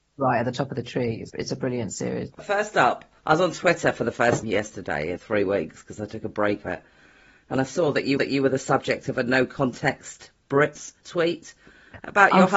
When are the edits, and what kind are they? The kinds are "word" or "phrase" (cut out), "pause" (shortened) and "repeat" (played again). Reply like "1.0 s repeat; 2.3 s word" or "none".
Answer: 1.3 s word; 2.3 s pause; 3.2 s pause; 4.4 s word; 5.2 s word; 6.6 s word; 8.2 s repeat; 11.0 s pause